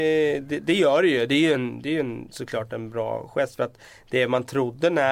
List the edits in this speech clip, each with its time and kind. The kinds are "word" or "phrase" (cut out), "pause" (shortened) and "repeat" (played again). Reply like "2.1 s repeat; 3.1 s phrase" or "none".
none